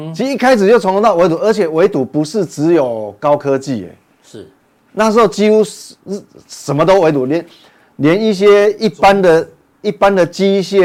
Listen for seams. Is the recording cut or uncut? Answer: uncut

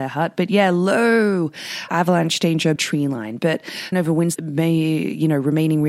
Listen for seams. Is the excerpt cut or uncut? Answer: cut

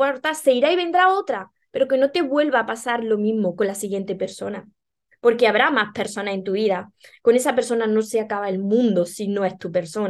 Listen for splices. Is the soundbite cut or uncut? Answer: uncut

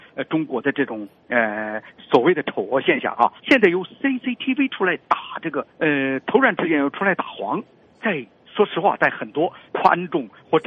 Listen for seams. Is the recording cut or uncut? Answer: cut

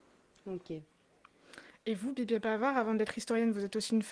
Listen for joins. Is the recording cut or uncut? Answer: uncut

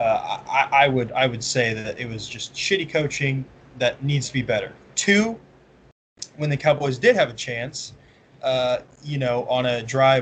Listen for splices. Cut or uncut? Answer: cut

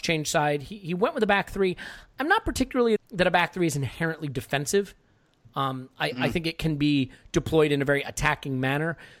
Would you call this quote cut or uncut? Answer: cut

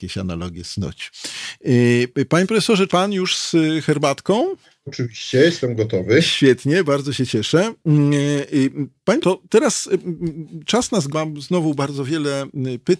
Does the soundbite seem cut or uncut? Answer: cut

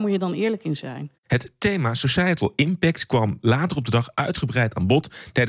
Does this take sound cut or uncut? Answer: cut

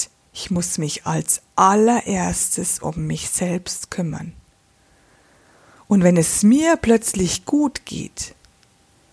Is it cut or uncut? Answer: uncut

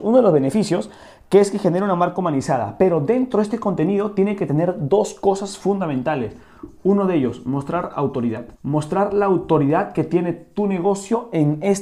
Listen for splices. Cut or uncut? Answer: cut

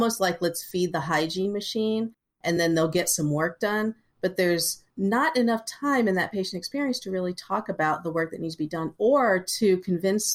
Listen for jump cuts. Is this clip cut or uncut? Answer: uncut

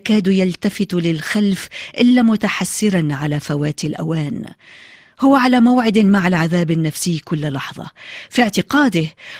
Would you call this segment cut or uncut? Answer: uncut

